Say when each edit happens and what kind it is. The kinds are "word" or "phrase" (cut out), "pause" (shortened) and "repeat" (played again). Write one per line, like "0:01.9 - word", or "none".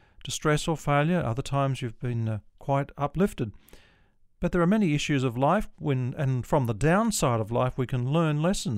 none